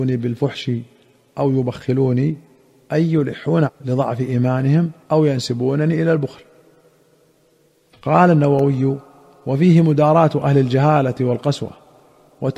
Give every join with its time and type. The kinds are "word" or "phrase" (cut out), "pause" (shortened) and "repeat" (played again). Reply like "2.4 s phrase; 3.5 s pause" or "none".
3.7 s word; 5.0 s pause